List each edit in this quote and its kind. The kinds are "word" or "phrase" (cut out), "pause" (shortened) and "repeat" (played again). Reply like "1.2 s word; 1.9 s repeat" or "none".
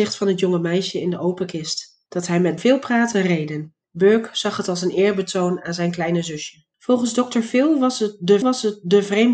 2.1 s pause; 2.6 s word; 3.1 s word; 3.8 s pause; 6.7 s pause; 8.4 s repeat